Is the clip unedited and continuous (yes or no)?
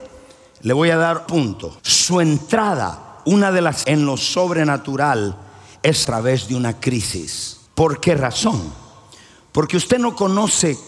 no